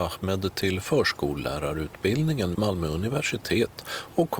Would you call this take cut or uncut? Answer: cut